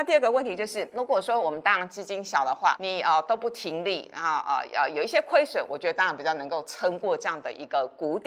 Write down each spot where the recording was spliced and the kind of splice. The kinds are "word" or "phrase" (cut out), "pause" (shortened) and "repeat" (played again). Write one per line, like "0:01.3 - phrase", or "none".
none